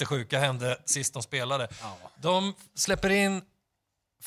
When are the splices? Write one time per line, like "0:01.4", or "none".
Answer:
none